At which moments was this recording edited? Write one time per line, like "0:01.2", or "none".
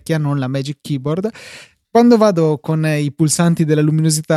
none